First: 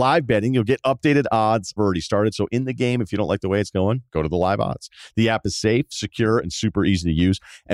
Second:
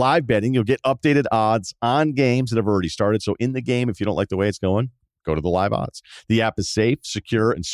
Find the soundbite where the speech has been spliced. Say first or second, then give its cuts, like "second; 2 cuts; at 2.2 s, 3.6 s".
first; 2 cuts; at 1.8 s, 4.1 s